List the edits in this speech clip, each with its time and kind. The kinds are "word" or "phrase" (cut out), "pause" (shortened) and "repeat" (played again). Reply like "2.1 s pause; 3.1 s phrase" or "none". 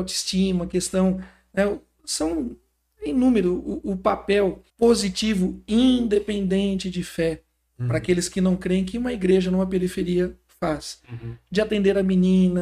4.7 s pause